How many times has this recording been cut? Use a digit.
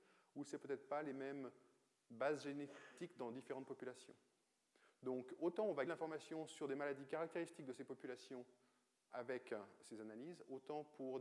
2